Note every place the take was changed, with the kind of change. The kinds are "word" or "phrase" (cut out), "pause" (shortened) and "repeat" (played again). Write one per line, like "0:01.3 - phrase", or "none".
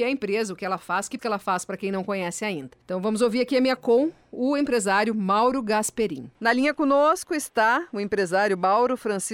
0:01.2 - word
0:02.8 - pause
0:03.8 - word
0:06.3 - pause